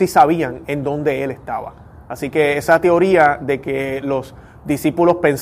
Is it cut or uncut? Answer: uncut